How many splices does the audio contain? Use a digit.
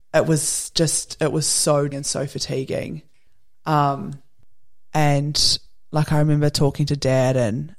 1